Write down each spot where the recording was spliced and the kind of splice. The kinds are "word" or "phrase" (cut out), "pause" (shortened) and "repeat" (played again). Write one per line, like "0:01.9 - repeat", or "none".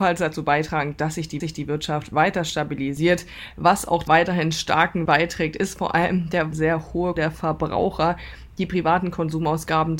0:01.4 - repeat
0:04.1 - word
0:05.1 - word
0:06.5 - word
0:07.2 - word